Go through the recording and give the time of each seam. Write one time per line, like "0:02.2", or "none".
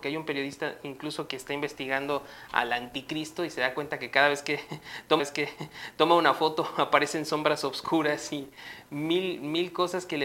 0:01.3
0:05.2

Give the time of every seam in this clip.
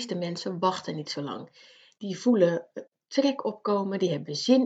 none

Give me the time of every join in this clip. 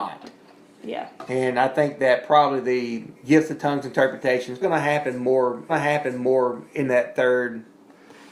0:03.2
0:04.6
0:05.7

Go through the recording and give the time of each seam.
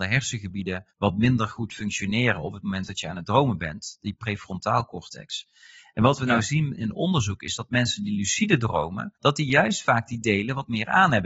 0:00.9
0:09.2

